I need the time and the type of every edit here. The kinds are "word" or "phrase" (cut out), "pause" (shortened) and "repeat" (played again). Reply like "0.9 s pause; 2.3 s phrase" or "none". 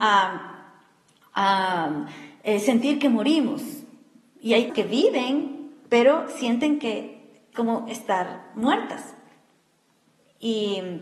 4.7 s word; 7.5 s word

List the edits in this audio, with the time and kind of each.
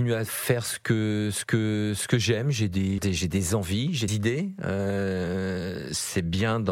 1.4 s repeat; 3.0 s phrase; 4.1 s word

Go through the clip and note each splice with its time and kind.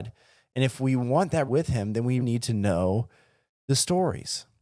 1.5 s word; 2.2 s word

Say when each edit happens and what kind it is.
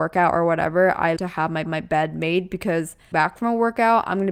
1.2 s word; 1.6 s repeat; 3.1 s word

